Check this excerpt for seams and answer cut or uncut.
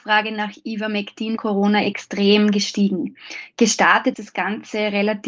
cut